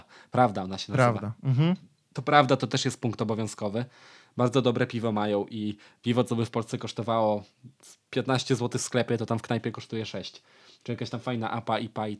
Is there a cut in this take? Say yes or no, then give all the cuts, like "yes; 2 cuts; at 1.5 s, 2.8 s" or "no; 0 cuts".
no; 0 cuts